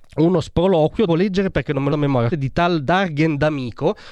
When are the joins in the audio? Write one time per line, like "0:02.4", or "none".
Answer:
0:01.1
0:01.9
0:02.3